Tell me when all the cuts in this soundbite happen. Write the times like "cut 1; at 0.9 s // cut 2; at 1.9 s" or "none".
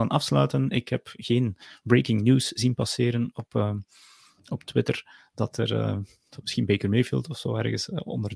none

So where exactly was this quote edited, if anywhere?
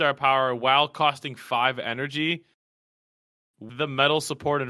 cut 1; at 3.7 s

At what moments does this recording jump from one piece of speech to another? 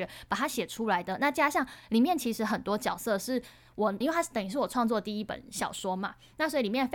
cut 1; at 4.0 s

